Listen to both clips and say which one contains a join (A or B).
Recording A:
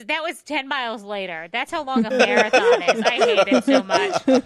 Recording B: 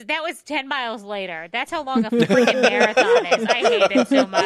A